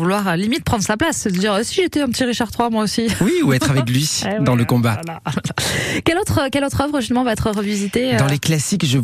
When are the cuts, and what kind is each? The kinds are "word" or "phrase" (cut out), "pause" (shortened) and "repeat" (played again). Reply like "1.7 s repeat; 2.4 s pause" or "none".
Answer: none